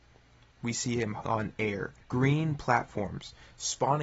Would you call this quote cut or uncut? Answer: cut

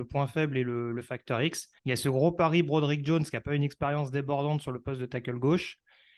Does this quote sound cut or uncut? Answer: cut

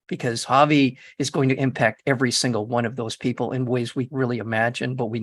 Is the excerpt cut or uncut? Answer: cut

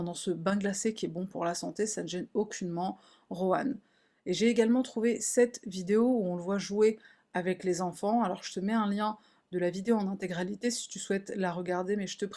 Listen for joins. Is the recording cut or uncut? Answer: uncut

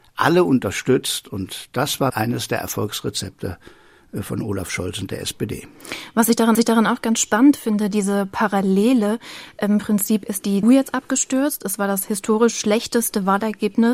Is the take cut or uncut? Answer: cut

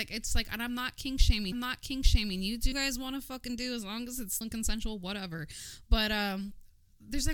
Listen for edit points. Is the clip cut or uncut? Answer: cut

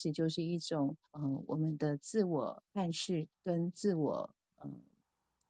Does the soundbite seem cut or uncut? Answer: cut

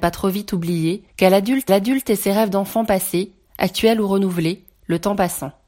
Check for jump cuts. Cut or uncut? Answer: cut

